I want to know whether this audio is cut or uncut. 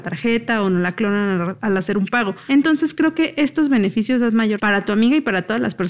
cut